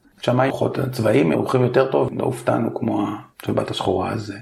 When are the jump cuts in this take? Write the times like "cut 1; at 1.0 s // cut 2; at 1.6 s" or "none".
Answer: cut 1; at 1.3 s // cut 2; at 3.3 s